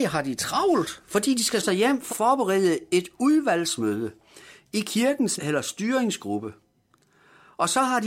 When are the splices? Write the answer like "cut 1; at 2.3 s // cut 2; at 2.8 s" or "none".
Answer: cut 1; at 1.6 s // cut 2; at 2.1 s // cut 3; at 5.4 s